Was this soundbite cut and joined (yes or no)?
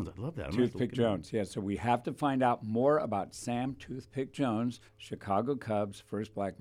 yes